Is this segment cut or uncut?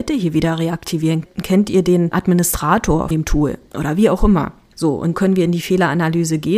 cut